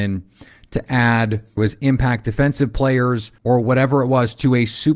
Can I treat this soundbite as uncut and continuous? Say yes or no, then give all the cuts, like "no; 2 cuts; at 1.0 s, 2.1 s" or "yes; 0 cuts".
no; 2 cuts; at 1.6 s, 3.4 s